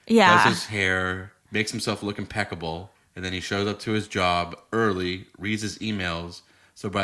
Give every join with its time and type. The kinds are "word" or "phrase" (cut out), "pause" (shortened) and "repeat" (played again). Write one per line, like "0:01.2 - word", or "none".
0:01.4 - pause
0:02.9 - pause